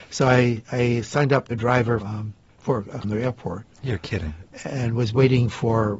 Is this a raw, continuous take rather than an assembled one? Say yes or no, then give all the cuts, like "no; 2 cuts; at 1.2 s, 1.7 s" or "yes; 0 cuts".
no; 4 cuts; at 1.5 s, 2.0 s, 2.5 s, 3.0 s